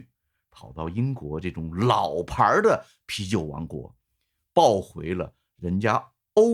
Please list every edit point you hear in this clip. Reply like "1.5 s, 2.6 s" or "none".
none